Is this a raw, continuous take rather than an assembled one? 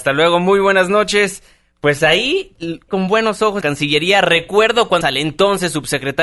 no; 3 cuts; at 2.9 s, 3.6 s, 5.0 s

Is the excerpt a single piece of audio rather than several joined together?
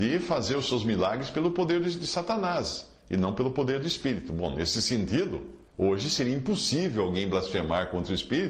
no; 1 cut; at 5.7 s

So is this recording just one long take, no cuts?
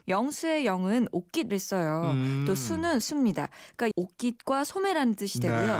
no; 3 cuts; at 1.5 s, 3.0 s, 3.9 s

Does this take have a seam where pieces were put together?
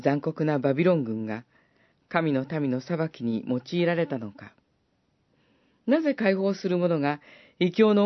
no; 0 cuts

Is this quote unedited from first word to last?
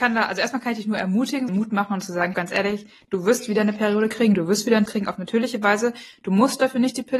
no; 3 cuts; at 1.5 s, 2.3 s, 4.9 s

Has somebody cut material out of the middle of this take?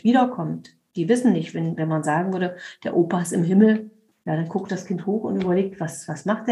no; 0 cuts

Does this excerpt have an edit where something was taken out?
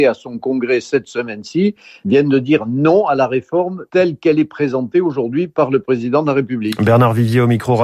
no; 0 cuts

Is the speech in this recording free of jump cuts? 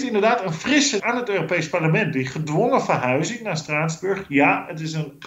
no; 1 cut; at 1.0 s

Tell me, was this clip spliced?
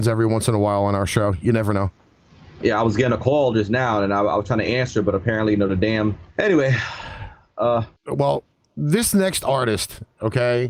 yes; 2 cuts; at 6.3 s, 8.0 s

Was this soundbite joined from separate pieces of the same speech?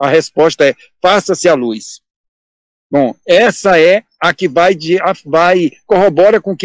no; 0 cuts

